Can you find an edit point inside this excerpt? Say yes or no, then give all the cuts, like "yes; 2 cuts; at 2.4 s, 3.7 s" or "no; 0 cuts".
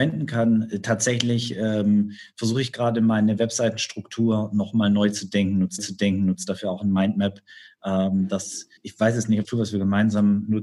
yes; 3 cuts; at 5.8 s, 8.8 s, 9.4 s